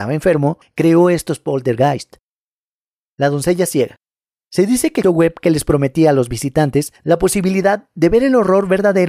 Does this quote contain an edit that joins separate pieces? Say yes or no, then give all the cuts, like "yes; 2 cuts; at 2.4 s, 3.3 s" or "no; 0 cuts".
yes; 1 cut; at 5.0 s